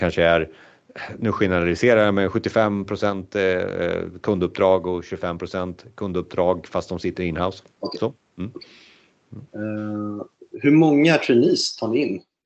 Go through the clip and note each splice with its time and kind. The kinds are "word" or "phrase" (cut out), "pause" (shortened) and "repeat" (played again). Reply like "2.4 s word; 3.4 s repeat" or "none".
7.7 s pause; 9.5 s pause